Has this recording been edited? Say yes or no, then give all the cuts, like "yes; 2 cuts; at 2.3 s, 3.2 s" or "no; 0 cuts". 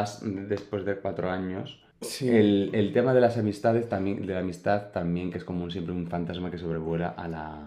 yes; 1 cut; at 1.9 s